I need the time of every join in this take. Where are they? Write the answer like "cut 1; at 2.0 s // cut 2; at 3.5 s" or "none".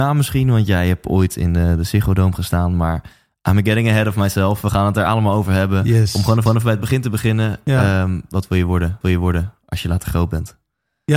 cut 1; at 6.5 s // cut 2; at 9.0 s

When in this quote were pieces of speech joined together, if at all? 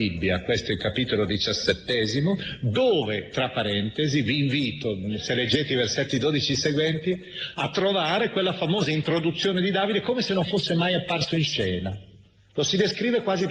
none

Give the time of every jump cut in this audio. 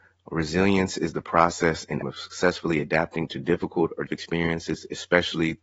cut 1; at 2.0 s // cut 2; at 4.1 s

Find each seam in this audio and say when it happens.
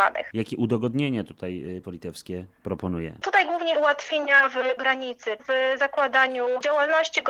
cut 1; at 1.8 s // cut 2; at 3.7 s // cut 3; at 4.8 s // cut 4; at 5.4 s

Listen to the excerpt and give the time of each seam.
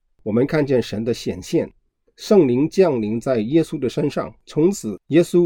cut 1; at 4.4 s

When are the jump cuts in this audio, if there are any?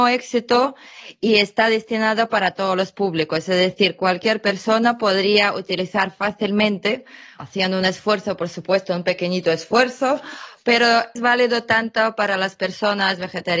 cut 1; at 7.4 s // cut 2; at 11.2 s

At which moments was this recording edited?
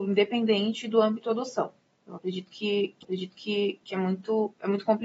cut 1; at 1.8 s // cut 2; at 3.0 s

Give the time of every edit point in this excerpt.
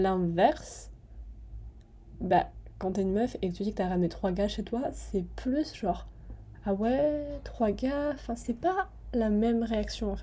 none

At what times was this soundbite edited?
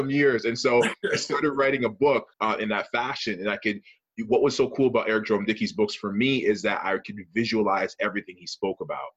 cut 1; at 2.3 s

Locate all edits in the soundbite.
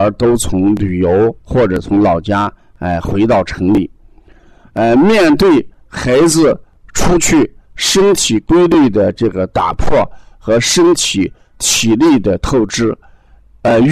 none

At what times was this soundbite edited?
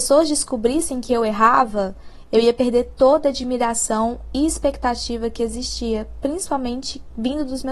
none

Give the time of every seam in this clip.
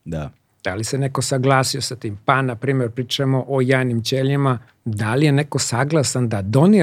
cut 1; at 4.7 s

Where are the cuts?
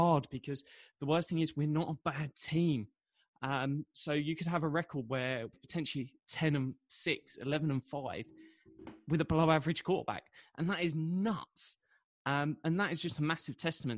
cut 1; at 5.5 s

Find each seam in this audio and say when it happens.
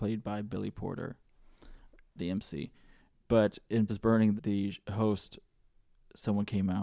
cut 1; at 2.2 s // cut 2; at 3.9 s // cut 3; at 4.4 s

